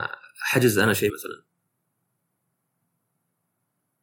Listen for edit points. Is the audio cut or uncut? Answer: cut